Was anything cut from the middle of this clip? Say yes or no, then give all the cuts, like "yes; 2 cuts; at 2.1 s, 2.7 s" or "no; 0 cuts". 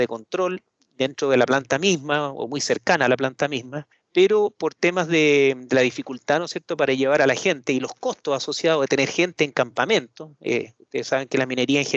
no; 0 cuts